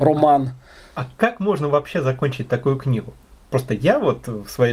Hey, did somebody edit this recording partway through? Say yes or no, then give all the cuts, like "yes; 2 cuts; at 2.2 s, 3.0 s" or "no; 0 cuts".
no; 0 cuts